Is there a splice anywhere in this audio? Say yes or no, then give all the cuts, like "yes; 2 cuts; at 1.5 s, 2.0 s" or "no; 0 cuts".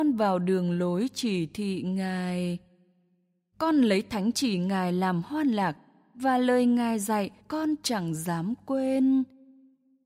yes; 1 cut; at 7.4 s